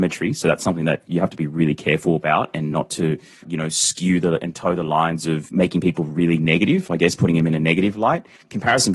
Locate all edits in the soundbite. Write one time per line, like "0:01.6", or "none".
none